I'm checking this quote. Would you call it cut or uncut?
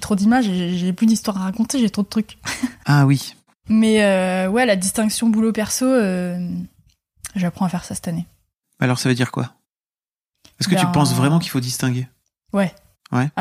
uncut